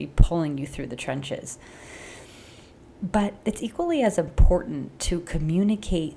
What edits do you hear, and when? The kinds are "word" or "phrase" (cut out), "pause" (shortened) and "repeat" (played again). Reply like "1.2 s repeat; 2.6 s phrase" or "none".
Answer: none